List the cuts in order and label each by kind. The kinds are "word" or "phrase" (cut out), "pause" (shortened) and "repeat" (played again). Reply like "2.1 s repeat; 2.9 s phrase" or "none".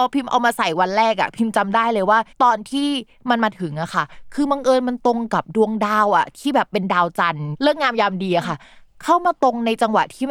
2.3 s pause